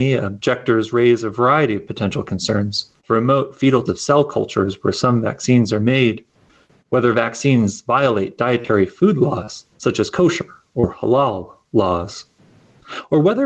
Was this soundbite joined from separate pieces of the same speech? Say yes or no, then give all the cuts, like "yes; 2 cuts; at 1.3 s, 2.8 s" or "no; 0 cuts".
yes; 3 cuts; at 3.0 s, 3.9 s, 9.7 s